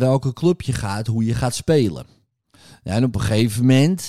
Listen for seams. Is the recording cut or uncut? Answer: uncut